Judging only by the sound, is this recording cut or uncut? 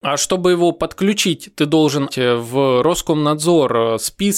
cut